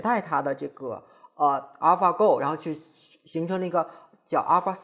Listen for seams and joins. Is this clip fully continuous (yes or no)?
yes